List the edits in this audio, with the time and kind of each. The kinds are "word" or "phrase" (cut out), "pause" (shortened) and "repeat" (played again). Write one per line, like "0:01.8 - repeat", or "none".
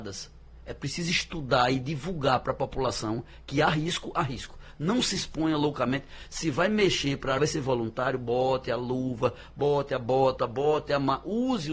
0:07.4 - word